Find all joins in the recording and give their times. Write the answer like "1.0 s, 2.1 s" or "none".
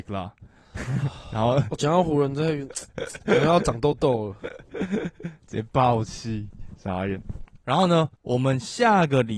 8.2 s